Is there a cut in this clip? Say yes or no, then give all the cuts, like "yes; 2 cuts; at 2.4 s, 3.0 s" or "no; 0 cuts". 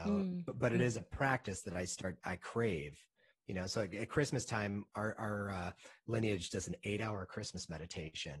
no; 0 cuts